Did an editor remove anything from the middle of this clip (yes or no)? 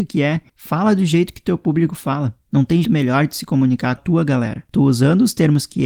yes